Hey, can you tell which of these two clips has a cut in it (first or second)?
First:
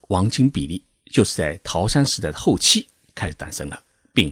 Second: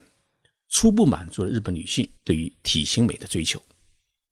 second